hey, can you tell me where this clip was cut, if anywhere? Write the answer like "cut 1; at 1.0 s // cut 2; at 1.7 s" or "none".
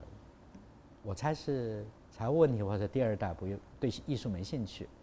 cut 1; at 2.0 s